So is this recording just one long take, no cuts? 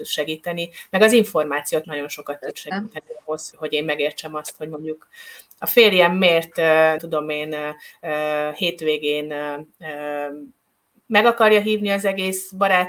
no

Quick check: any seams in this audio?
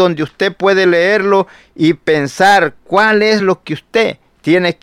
no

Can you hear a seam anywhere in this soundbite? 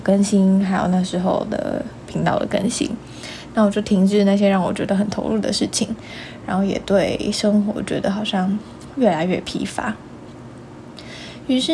yes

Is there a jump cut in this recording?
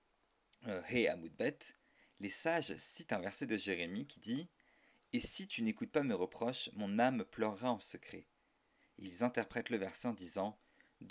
no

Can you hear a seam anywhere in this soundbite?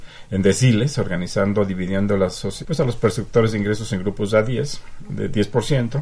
yes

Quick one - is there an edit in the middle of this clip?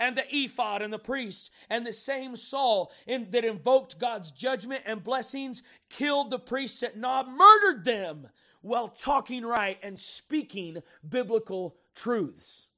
no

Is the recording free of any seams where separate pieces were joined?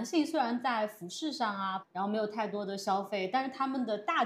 no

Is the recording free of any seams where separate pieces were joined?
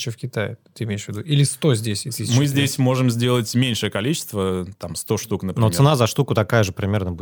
yes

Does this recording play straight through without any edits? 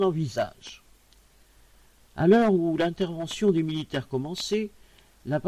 yes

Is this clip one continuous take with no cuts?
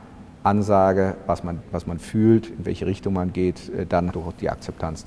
no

